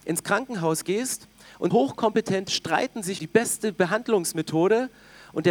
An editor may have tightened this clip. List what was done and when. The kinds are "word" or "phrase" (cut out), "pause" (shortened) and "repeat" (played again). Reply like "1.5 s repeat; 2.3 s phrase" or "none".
1.7 s word; 2.5 s word; 3.2 s word